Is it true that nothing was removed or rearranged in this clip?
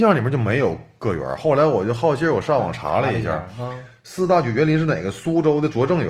yes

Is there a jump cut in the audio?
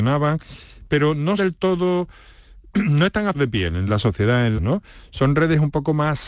yes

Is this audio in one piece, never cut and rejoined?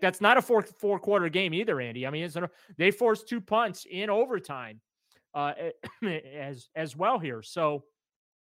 yes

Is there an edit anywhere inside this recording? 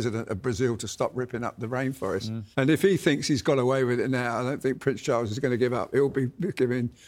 yes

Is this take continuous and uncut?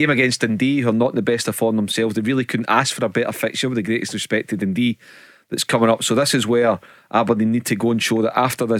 yes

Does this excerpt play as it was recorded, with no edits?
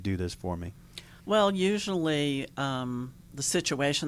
no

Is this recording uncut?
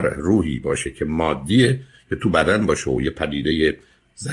yes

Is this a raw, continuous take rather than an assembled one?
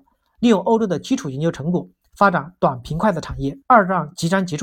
no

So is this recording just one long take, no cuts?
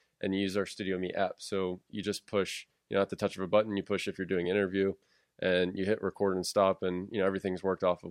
yes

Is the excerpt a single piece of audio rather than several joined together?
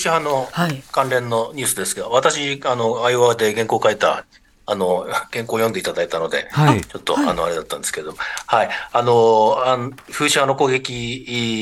yes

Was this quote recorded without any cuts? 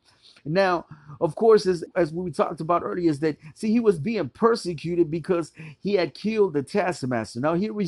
no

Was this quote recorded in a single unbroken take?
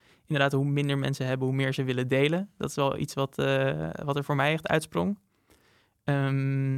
yes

